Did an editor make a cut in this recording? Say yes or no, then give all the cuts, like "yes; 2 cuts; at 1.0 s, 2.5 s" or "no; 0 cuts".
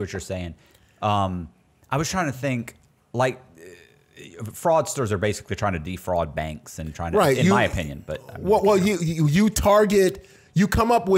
no; 0 cuts